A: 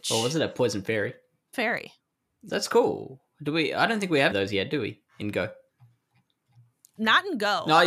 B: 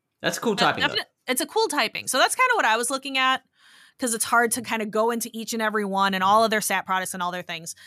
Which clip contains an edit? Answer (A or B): A